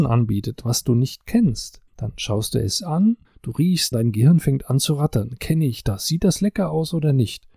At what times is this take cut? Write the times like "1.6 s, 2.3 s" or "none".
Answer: 1.9 s, 3.2 s, 3.9 s